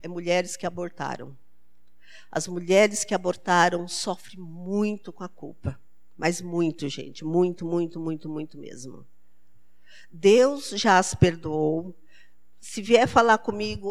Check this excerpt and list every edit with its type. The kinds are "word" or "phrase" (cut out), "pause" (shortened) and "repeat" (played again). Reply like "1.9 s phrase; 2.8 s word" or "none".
none

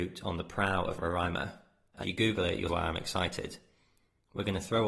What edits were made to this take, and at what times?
1.0 s word; 2.0 s word; 2.7 s word

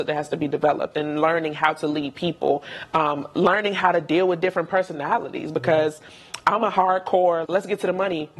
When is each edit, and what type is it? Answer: 7.5 s word

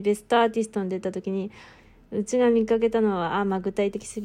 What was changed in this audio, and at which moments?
none

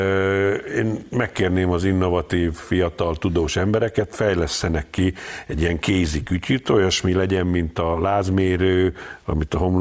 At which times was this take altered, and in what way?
none

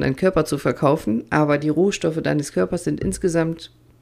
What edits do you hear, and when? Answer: none

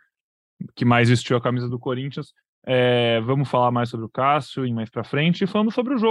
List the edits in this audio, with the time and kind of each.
2.4 s pause; 4.6 s phrase

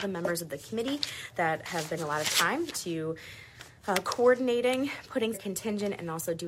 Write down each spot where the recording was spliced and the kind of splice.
2.0 s word; 2.7 s word; 5.3 s word

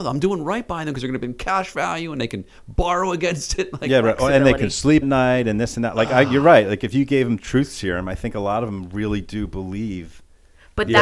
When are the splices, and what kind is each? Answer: 5.0 s word

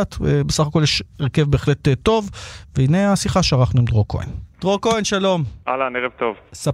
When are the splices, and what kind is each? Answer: 4.5 s pause

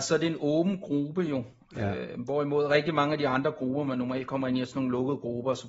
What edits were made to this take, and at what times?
none

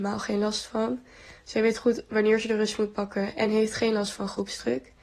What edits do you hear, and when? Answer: none

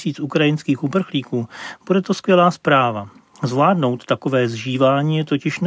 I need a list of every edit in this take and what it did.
none

